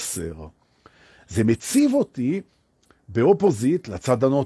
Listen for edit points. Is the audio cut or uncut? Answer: uncut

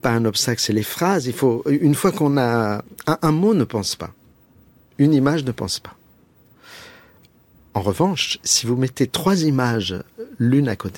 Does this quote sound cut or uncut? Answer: uncut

